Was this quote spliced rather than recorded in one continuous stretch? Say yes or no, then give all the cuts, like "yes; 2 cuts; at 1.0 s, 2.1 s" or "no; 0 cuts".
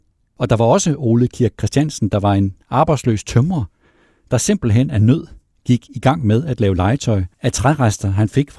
no; 0 cuts